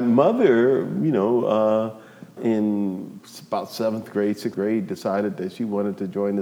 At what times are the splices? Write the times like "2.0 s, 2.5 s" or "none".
2.4 s, 4.5 s